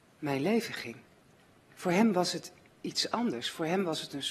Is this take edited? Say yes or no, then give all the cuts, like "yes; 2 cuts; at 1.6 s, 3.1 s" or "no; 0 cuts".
no; 0 cuts